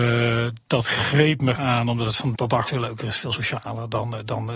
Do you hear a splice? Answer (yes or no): yes